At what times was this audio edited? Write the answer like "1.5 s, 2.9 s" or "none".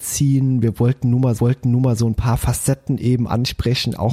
1.4 s